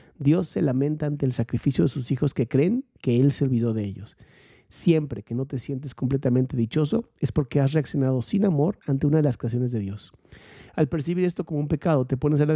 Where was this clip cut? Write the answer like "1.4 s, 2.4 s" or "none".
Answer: none